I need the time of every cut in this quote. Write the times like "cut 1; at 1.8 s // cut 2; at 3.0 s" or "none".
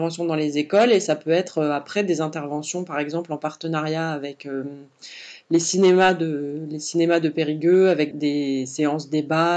cut 1; at 8.1 s